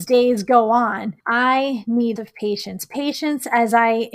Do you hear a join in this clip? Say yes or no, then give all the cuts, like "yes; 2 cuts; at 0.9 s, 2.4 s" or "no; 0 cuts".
yes; 2 cuts; at 1.2 s, 2.2 s